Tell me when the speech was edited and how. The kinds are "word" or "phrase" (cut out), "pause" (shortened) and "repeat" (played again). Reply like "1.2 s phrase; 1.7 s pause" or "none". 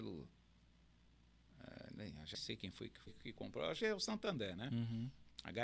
2.3 s word; 3.1 s word; 3.8 s word